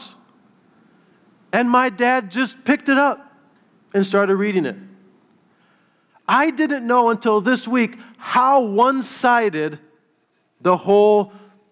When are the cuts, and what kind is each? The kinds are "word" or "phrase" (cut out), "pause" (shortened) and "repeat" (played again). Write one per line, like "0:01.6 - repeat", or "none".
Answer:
none